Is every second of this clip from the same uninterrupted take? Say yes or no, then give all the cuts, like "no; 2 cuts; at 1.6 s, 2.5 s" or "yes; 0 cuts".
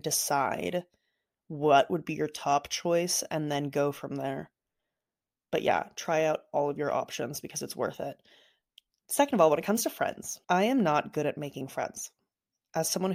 no; 1 cut; at 10.4 s